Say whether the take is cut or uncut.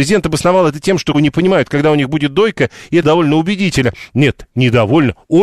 cut